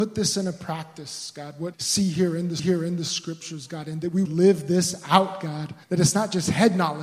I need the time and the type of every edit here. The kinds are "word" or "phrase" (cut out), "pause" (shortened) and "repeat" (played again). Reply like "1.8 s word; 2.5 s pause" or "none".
1.7 s word; 2.6 s repeat; 4.3 s word; 5.8 s pause